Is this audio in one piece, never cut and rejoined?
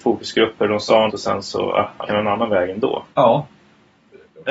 no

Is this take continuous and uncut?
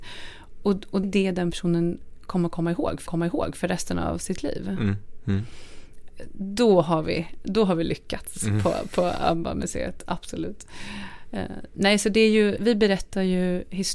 no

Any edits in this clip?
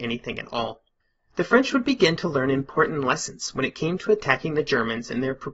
yes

